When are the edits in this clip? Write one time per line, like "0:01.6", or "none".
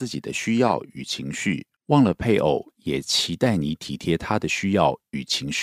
0:01.8